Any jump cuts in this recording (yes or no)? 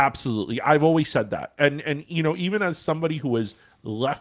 no